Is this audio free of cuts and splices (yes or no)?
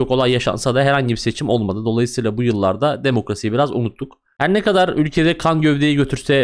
yes